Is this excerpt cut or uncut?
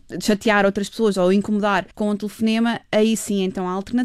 cut